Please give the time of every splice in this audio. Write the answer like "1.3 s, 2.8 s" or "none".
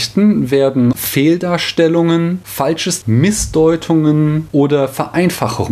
0.9 s, 3.0 s